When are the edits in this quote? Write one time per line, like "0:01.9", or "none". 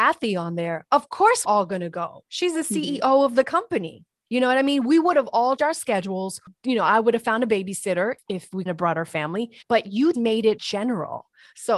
0:01.4
0:05.6
0:08.7
0:09.6
0:10.1
0:10.6

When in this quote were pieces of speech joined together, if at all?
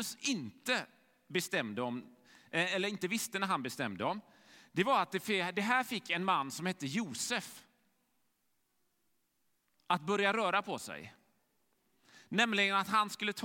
none

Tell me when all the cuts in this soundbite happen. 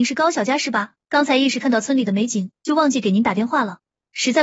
0:01.0
0:02.6

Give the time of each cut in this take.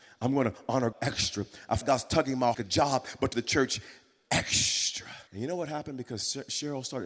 0:00.9
0:01.8
0:02.5
0:03.3
0:05.3

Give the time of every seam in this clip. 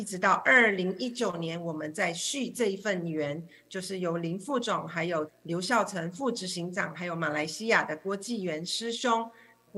none

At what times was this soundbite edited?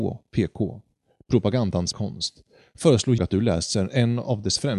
0:01.9
0:03.2

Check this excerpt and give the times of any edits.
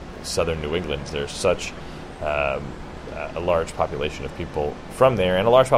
0:01.1

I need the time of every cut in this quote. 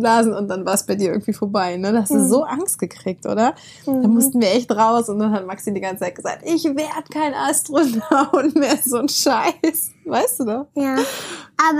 none

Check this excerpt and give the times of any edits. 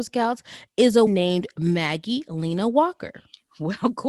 0:01.1

